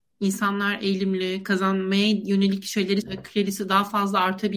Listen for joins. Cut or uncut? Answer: cut